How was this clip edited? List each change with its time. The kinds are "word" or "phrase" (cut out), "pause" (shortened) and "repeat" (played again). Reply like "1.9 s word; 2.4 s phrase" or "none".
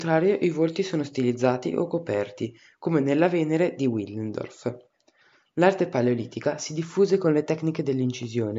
none